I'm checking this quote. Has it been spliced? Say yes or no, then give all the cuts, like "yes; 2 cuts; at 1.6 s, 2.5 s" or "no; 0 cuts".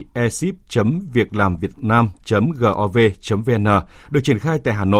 no; 0 cuts